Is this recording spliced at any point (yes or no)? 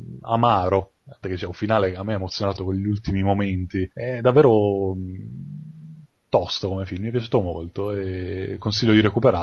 yes